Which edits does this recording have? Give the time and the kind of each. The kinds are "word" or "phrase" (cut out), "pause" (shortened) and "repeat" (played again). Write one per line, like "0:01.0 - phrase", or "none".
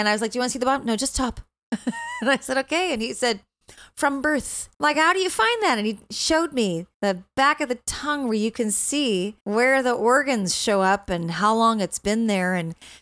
0:04.7 - pause
0:06.9 - pause
0:09.4 - pause

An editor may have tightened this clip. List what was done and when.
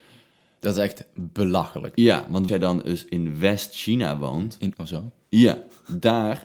0:02.5 - word
0:04.7 - word

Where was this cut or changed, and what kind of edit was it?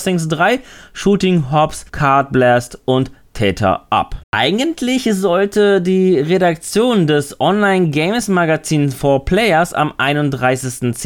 0:01.9 - pause
0:04.2 - pause

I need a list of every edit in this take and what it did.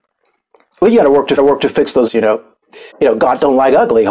0:01.4 - repeat
0:02.1 - word
0:02.9 - pause

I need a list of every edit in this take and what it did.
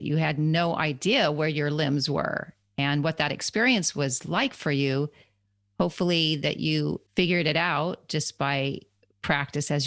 0:07.1 - pause

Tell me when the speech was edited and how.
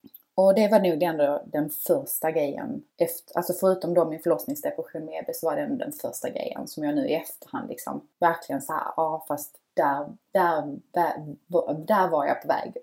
0:02.9 - pause
0:08.1 - pause

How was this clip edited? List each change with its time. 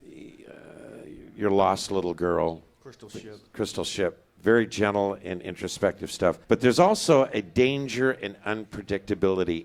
0:06.4 - pause

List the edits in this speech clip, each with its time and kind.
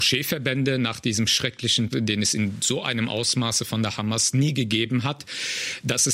0:01.9 - word

